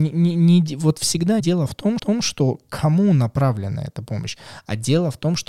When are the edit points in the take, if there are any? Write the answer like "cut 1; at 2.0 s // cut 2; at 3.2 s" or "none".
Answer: cut 1; at 1.4 s // cut 2; at 2.0 s